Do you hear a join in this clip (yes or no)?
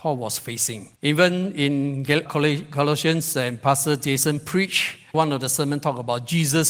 yes